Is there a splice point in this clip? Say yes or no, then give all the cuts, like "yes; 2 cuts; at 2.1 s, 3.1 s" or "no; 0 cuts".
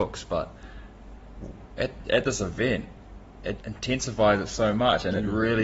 yes; 1 cut; at 3.6 s